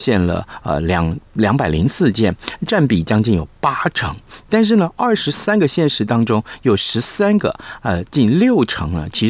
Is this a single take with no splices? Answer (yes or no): yes